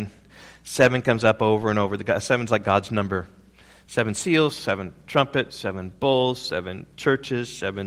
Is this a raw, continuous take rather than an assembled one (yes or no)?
yes